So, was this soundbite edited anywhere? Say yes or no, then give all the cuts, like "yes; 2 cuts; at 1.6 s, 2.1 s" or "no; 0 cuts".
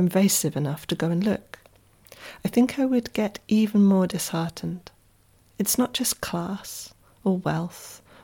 no; 0 cuts